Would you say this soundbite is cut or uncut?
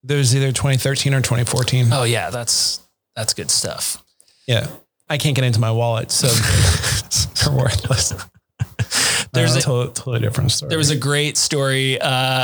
cut